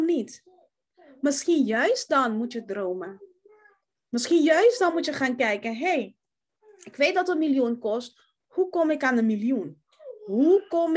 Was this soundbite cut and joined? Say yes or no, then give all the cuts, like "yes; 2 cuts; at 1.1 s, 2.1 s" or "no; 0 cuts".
no; 0 cuts